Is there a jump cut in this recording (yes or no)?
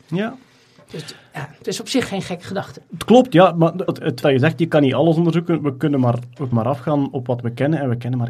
yes